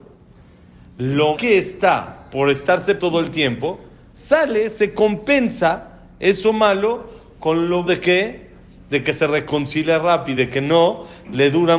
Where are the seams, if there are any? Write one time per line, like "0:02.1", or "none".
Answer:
0:01.4
0:03.0
0:07.9
0:10.4